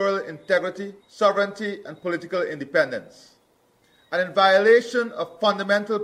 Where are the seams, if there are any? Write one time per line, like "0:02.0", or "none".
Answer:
0:01.0